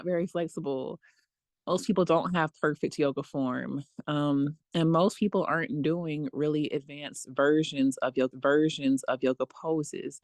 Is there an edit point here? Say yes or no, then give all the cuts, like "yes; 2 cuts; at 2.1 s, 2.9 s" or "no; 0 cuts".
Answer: yes; 1 cut; at 8.3 s